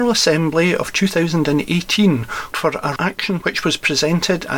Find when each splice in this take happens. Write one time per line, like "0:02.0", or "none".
0:02.5
0:03.0
0:03.4